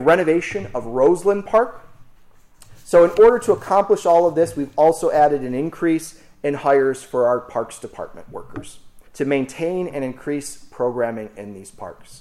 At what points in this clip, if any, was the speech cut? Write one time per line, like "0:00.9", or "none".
0:09.1